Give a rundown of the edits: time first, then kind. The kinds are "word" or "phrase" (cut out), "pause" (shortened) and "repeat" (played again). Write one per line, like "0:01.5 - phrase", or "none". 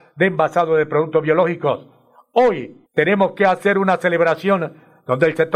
0:02.9 - pause